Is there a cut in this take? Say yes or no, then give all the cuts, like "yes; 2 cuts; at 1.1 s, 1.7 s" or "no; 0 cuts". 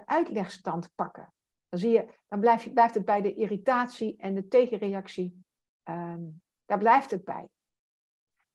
no; 0 cuts